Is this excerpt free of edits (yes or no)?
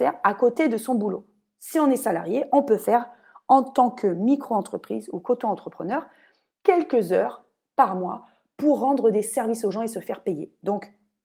yes